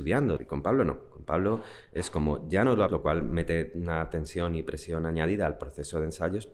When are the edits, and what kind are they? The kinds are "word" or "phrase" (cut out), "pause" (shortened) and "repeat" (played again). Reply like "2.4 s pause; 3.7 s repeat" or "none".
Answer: 2.9 s word